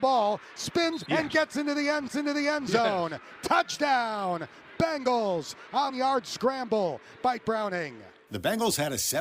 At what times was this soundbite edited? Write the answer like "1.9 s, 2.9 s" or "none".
1.1 s, 2.1 s, 5.9 s, 7.4 s